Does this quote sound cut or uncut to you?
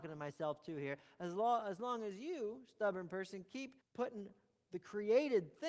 cut